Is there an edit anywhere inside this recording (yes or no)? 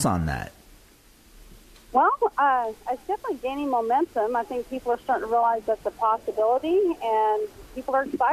no